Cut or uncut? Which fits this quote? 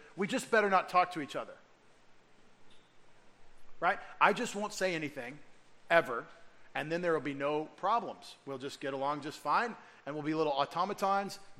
uncut